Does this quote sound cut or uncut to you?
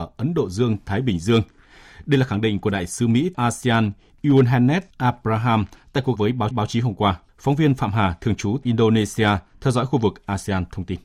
cut